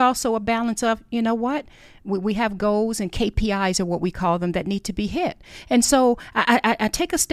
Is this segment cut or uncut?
uncut